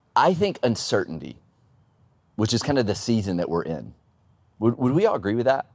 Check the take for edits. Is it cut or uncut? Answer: uncut